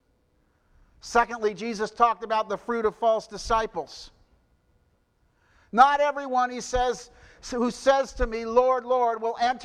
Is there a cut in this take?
no; 0 cuts

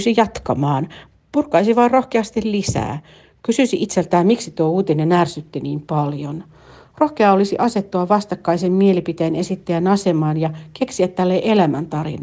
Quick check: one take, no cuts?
yes; 0 cuts

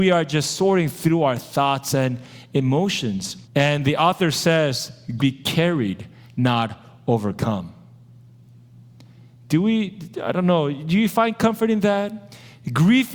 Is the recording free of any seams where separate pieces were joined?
no; 2 cuts; at 3.4 s, 5.2 s

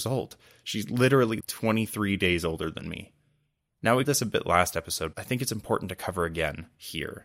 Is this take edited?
yes; 3 cuts; at 1.4 s, 4.1 s, 5.1 s

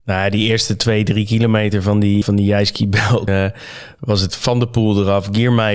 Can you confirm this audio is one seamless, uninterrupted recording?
no; 3 cuts; at 2.2 s, 3.3 s, 4.3 s

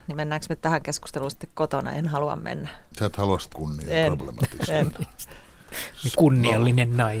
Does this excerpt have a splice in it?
yes; 2 cuts; at 3.5 s, 6.1 s

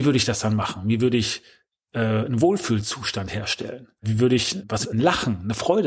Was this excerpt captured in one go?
no; 1 cut; at 4.8 s

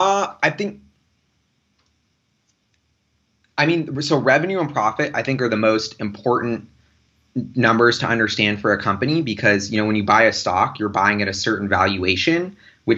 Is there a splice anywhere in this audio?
no; 0 cuts

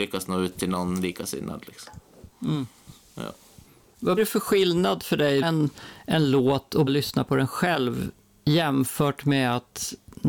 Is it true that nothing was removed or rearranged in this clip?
no; 3 cuts; at 4.2 s, 5.4 s, 6.9 s

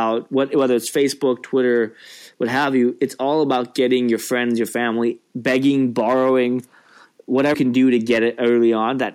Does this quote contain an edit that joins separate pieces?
yes; 1 cut; at 7.5 s

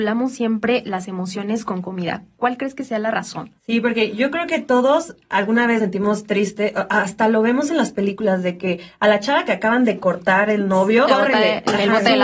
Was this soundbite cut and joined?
yes; 3 cuts; at 3.6 s, 5.8 s, 11.1 s

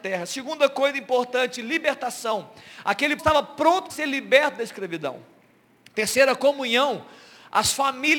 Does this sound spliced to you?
yes; 3 cuts; at 3.2 s, 3.9 s, 6.4 s

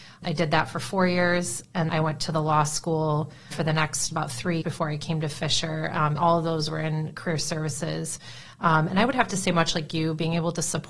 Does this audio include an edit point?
yes; 5 cuts; at 1.9 s, 3.5 s, 4.1 s, 4.6 s, 6.2 s

